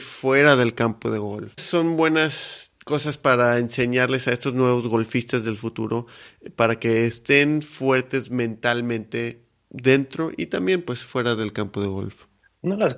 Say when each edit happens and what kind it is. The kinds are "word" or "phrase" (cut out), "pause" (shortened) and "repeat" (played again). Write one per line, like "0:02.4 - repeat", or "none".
0:01.6 - word